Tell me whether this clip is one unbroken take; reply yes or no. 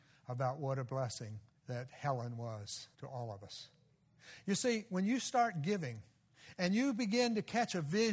no